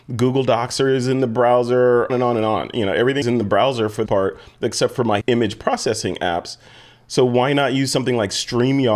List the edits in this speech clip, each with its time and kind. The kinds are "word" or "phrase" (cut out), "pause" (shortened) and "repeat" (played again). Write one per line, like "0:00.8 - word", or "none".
0:02.1 - word
0:03.2 - word
0:04.1 - word
0:05.2 - word